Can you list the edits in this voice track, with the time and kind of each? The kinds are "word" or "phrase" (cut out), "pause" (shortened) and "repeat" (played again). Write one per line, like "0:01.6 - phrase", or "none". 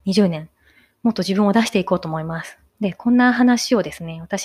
0:02.7 - pause